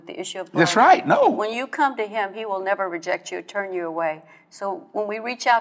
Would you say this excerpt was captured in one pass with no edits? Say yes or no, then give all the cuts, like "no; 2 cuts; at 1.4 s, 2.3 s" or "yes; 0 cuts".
yes; 0 cuts